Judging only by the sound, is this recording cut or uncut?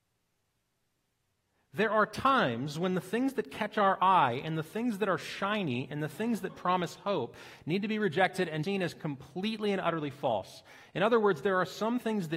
cut